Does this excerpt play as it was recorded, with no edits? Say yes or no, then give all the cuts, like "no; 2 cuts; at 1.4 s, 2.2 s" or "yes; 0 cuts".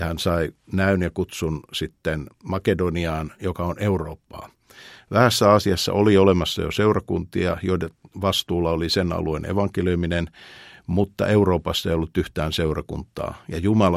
yes; 0 cuts